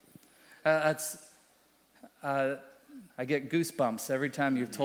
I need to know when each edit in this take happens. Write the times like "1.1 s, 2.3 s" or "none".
3.1 s